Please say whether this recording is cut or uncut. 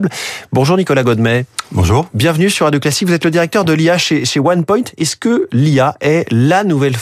uncut